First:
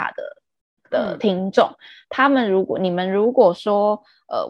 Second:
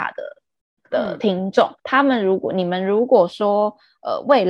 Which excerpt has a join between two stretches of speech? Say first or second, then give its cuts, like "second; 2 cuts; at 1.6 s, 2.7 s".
second; 1 cut; at 1.8 s